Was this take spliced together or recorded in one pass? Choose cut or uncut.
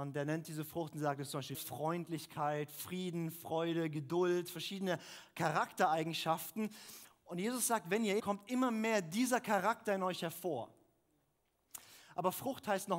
cut